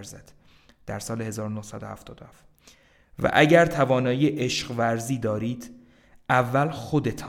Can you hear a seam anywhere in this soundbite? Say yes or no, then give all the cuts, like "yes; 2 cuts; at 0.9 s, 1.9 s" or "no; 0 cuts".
no; 0 cuts